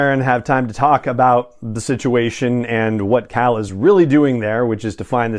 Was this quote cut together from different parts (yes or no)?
no